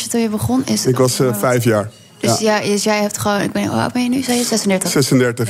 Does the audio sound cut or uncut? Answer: uncut